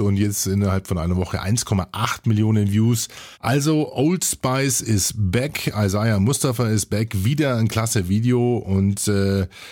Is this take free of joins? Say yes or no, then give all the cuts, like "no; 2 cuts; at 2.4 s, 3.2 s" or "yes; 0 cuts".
no; 1 cut; at 3.3 s